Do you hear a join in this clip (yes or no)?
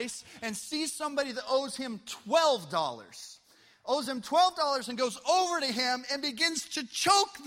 no